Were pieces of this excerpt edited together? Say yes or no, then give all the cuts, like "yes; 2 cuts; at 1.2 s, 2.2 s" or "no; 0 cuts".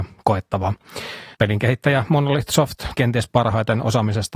yes; 2 cuts; at 1.3 s, 2.9 s